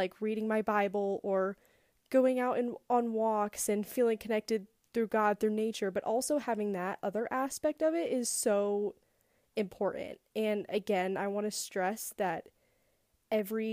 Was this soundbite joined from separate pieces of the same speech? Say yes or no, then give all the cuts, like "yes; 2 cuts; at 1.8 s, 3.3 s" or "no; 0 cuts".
no; 0 cuts